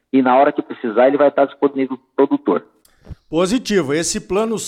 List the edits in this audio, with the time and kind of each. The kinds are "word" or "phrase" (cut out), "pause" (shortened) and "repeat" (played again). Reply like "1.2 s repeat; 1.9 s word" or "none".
none